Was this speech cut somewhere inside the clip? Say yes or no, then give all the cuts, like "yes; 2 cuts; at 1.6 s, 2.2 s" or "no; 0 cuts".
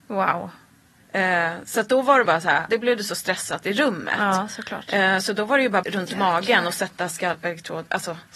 yes; 3 cuts; at 2.2 s, 2.7 s, 5.8 s